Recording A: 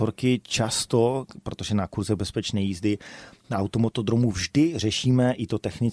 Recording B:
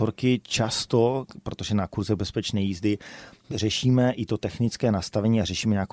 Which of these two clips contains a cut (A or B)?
B